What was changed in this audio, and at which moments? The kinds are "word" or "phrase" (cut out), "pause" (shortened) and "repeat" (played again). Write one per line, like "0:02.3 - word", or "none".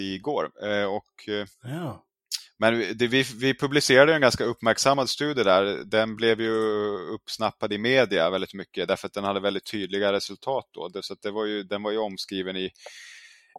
0:01.5 - pause